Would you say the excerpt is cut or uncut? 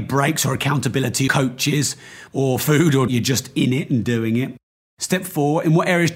cut